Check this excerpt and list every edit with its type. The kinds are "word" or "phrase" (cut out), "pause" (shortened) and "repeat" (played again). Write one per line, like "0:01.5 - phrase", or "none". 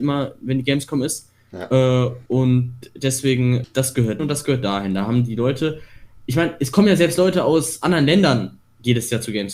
0:02.3 - pause
0:03.6 - word
0:04.2 - word